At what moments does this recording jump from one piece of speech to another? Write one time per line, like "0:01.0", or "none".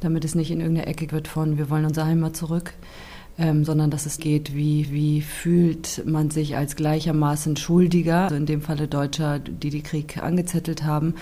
0:01.1
0:04.2
0:04.8
0:08.3